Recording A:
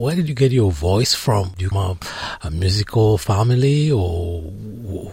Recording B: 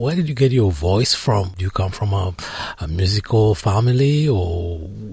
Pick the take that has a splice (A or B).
A